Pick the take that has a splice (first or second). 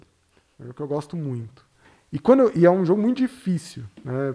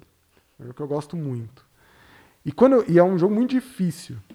first